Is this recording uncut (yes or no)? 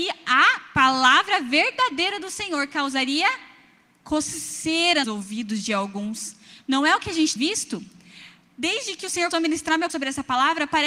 no